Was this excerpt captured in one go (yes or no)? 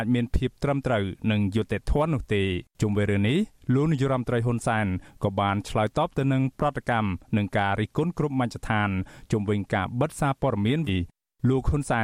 no